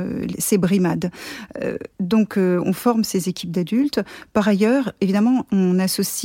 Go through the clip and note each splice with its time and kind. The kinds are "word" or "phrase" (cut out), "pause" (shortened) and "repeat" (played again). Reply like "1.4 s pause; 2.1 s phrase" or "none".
1.9 s pause